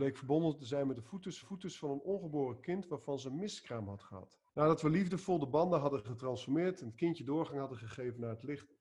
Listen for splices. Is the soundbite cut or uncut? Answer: cut